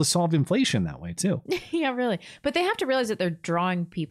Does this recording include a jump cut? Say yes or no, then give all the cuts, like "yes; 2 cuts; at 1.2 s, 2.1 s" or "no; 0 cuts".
no; 0 cuts